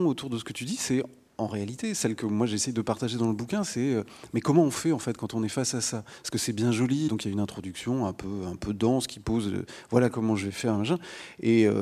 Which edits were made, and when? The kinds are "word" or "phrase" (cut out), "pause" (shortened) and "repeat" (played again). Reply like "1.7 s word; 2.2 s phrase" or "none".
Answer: 7.1 s word